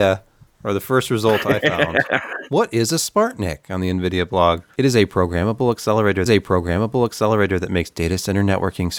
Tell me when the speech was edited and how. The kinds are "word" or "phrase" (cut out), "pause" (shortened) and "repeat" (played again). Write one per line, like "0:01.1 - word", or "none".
0:06.3 - repeat